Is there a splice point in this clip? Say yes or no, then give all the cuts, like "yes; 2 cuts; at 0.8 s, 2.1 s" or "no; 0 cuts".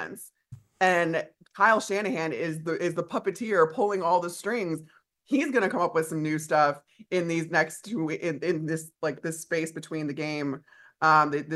no; 0 cuts